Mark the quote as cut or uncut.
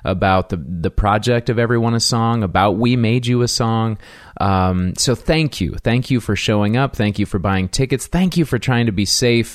uncut